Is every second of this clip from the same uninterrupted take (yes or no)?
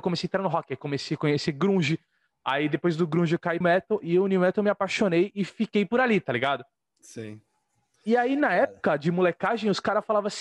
no